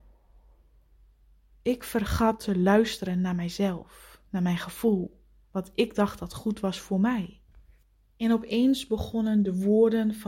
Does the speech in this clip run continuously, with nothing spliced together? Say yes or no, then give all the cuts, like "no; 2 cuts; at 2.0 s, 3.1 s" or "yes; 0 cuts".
yes; 0 cuts